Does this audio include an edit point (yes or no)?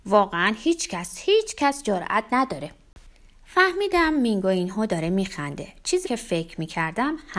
yes